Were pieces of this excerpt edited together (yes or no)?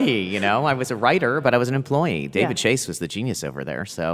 no